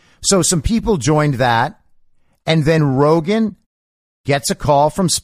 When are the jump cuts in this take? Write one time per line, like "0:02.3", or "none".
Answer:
none